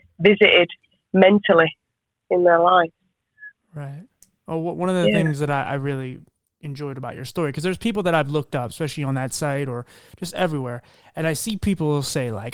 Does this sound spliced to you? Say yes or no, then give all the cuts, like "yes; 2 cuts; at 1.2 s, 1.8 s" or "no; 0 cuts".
no; 0 cuts